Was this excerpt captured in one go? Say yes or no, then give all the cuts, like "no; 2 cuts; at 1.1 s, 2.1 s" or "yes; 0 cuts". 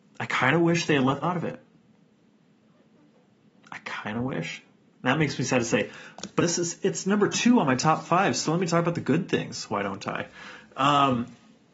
no; 2 cuts; at 1.2 s, 6.4 s